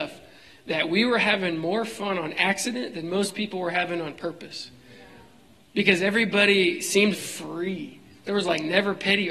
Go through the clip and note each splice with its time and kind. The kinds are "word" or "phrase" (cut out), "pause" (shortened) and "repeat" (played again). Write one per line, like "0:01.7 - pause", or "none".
0:07.1 - word